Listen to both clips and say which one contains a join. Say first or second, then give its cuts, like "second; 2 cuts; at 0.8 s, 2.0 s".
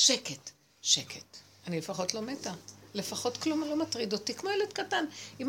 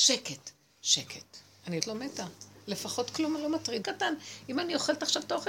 second; 2 cuts; at 1.8 s, 3.8 s